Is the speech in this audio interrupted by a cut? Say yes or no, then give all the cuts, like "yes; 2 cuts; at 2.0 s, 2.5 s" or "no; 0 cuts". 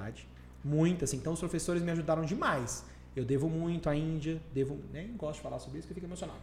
no; 0 cuts